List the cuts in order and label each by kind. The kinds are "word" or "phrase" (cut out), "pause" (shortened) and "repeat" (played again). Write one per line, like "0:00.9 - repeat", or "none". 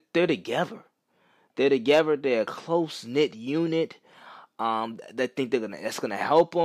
none